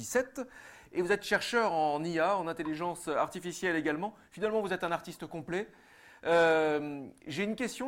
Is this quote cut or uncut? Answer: uncut